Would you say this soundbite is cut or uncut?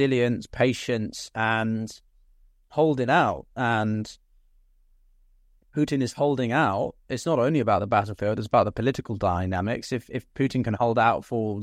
uncut